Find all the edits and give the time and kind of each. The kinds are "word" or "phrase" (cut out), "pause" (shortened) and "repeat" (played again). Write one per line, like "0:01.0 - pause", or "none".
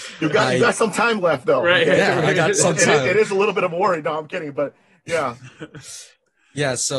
none